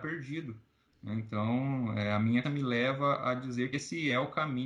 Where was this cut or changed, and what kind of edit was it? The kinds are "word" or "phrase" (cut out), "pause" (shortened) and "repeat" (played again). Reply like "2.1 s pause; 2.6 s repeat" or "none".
2.4 s word; 3.7 s word